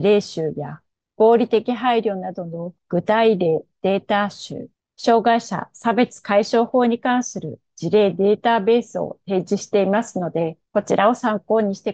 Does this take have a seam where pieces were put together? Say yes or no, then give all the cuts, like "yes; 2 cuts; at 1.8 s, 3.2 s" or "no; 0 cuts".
yes; 3 cuts; at 2.8 s, 4.7 s, 10.7 s